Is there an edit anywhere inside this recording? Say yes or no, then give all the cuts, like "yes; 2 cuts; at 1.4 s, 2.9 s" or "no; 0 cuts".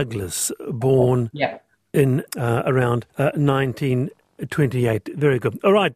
yes; 2 cuts; at 2.3 s, 3.1 s